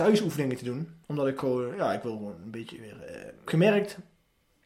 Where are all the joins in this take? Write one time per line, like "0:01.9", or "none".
0:01.0
0:03.5